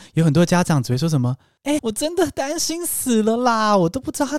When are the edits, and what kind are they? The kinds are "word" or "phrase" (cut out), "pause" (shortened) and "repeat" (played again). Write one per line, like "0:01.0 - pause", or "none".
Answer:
0:01.8 - word